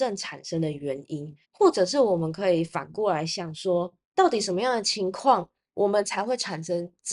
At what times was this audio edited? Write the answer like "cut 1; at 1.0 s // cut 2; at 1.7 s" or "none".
cut 1; at 1.4 s // cut 2; at 4.0 s